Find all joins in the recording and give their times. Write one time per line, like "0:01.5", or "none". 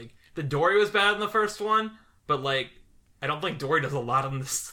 none